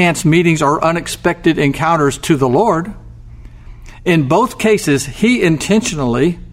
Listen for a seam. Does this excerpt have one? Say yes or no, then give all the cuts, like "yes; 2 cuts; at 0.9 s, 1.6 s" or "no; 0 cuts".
no; 0 cuts